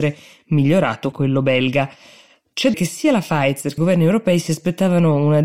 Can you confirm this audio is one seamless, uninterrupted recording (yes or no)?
no